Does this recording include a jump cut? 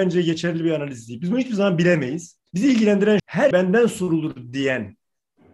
yes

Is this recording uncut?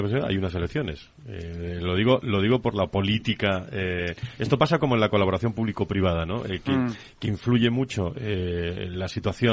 yes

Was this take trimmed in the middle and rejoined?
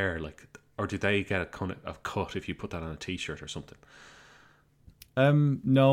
no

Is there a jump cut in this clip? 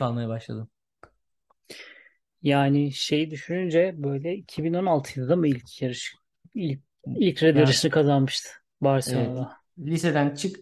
yes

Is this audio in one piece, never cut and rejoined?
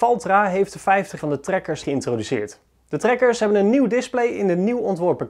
no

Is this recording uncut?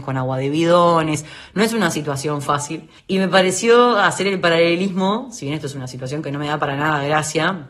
no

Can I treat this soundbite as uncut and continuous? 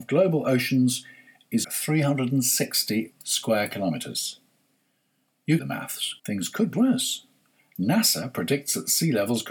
no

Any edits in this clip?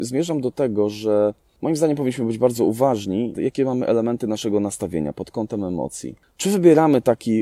no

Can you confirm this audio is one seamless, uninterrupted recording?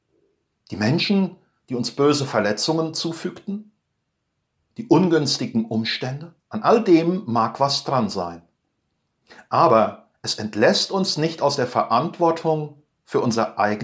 no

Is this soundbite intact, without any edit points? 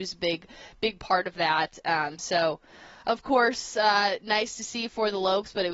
yes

